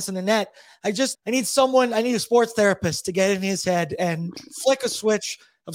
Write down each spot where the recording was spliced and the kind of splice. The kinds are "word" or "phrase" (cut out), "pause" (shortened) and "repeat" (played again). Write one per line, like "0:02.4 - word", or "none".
0:01.1 - word